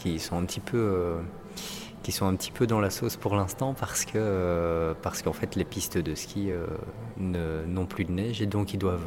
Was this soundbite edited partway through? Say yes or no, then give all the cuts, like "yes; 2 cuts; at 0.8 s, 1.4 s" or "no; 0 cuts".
no; 0 cuts